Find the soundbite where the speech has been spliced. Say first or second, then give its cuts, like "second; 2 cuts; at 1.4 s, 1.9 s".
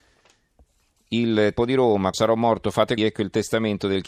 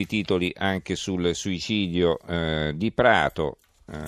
first; 3 cuts; at 1.6 s, 2.1 s, 3.0 s